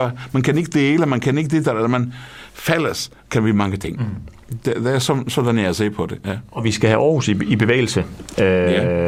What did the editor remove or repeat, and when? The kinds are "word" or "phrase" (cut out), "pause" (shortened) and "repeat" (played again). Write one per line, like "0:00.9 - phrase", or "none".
none